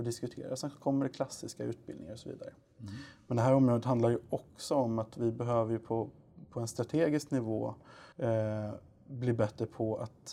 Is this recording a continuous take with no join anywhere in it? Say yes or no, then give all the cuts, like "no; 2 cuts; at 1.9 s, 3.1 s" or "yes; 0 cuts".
no; 1 cut; at 8.1 s